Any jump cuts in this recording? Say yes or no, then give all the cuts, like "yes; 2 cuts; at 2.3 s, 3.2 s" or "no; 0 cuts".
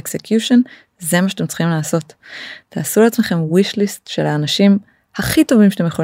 no; 0 cuts